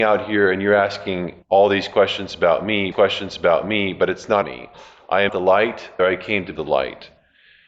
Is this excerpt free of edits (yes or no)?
no